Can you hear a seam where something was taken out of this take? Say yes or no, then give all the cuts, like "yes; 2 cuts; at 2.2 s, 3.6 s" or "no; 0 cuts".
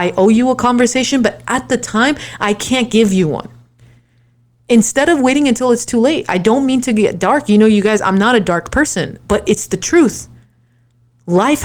no; 0 cuts